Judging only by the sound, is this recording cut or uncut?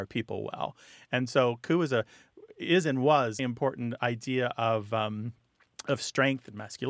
cut